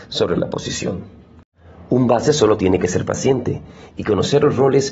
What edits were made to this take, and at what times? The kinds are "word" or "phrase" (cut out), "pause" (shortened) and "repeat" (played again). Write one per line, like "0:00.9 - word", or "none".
none